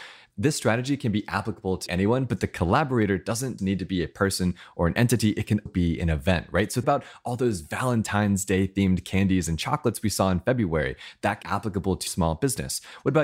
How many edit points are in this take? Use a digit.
6